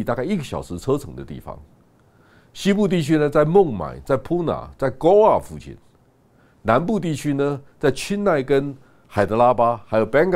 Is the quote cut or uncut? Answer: uncut